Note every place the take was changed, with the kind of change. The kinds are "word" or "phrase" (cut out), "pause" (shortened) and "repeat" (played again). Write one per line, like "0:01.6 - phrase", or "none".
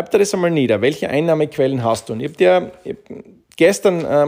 none

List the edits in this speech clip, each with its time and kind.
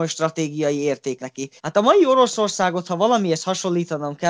0:01.2 - word
0:01.6 - pause

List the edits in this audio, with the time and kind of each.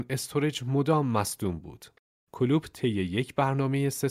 none

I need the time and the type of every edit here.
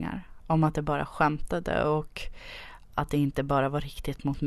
none

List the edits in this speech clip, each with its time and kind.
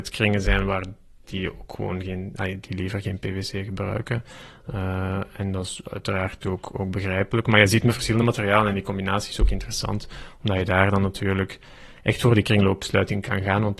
none

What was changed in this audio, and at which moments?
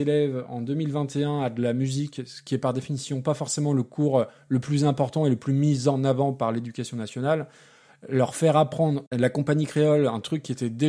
0:09.1 - word

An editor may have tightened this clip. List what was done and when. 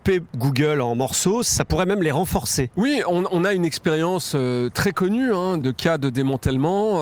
0:05.6 - word

